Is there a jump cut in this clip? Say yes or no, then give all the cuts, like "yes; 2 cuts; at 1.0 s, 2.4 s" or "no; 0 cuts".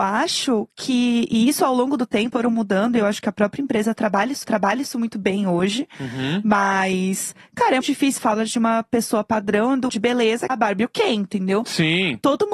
yes; 6 cuts; at 2.3 s, 4.4 s, 7.8 s, 8.2 s, 9.9 s, 10.5 s